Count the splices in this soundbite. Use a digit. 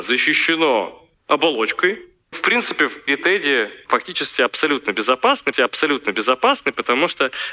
4